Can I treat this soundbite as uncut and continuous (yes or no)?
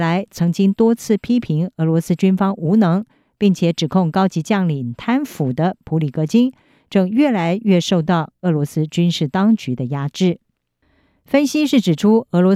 yes